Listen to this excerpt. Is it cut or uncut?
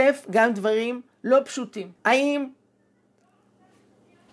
cut